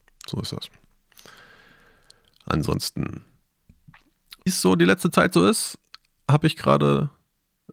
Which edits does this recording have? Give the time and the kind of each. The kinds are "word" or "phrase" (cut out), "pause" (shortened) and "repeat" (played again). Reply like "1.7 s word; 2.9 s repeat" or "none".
4.5 s word

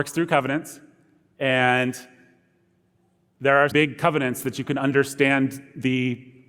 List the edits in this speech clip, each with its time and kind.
3.7 s word

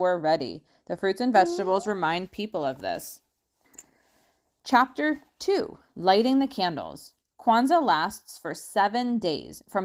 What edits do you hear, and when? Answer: none

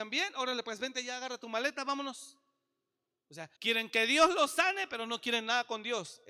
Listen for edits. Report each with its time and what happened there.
3.6 s pause

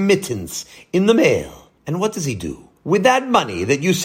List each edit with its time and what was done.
1.8 s pause; 2.8 s pause

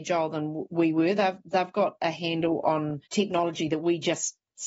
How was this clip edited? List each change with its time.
3.1 s pause

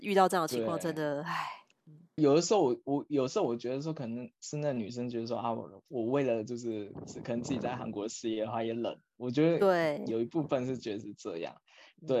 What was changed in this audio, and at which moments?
2.2 s word; 4.3 s pause

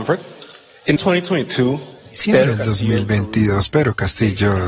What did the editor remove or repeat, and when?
1.0 s word

